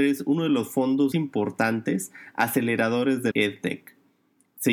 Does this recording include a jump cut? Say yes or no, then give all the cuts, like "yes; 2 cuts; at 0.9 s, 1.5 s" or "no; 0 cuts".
yes; 2 cuts; at 1.1 s, 3.3 s